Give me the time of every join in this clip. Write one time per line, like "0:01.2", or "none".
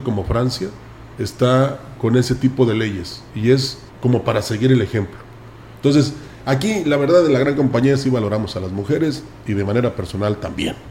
0:01.1
0:03.3
0:03.9